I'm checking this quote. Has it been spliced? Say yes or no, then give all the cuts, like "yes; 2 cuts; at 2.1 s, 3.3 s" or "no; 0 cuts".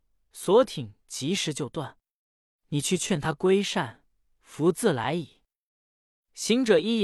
no; 0 cuts